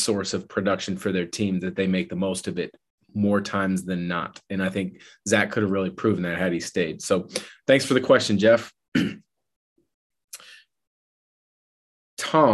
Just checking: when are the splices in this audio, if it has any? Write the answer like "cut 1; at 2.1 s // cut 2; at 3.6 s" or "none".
none